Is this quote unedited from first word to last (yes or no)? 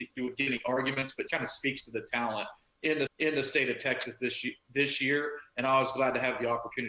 no